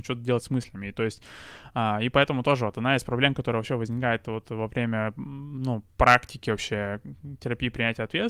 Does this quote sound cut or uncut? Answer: cut